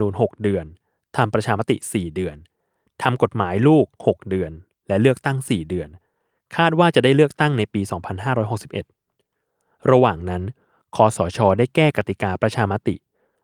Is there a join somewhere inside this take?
no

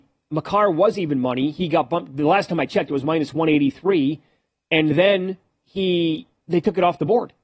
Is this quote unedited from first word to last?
yes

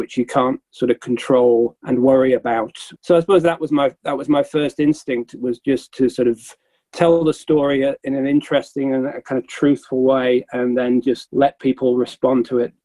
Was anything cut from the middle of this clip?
no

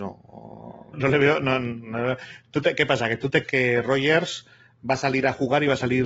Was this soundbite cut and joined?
yes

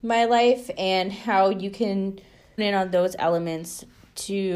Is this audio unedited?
no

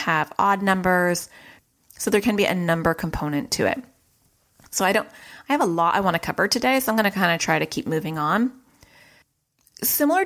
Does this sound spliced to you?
no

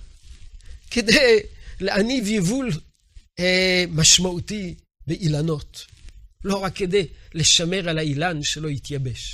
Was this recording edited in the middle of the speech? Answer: no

